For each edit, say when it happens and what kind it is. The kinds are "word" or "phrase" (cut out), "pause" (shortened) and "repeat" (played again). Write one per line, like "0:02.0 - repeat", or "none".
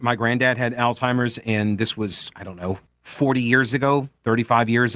0:02.3 - word
0:02.9 - pause